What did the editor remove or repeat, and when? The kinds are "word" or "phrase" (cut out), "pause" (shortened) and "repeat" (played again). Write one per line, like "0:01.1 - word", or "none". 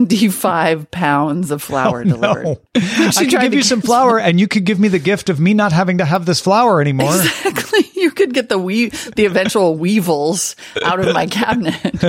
0:02.7 - pause